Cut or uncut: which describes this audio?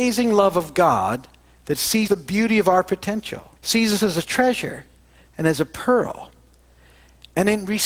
cut